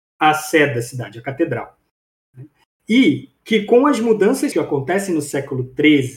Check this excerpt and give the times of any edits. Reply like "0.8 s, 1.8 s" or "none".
4.5 s